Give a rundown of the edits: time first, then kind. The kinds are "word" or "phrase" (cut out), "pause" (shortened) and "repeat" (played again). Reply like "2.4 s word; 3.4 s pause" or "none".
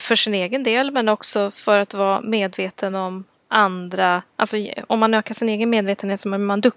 none